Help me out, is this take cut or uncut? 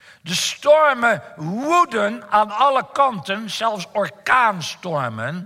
uncut